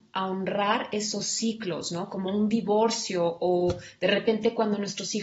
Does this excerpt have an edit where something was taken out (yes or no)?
no